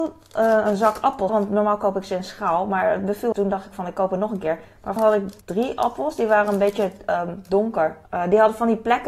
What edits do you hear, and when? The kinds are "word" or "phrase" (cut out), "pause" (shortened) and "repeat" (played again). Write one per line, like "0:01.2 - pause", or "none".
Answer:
0:01.3 - word
0:03.3 - phrase
0:05.0 - word
0:05.4 - pause
0:08.0 - pause